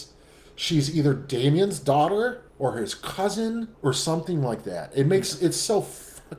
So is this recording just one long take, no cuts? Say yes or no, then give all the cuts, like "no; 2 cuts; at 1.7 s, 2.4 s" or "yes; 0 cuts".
no; 2 cuts; at 2.5 s, 3.7 s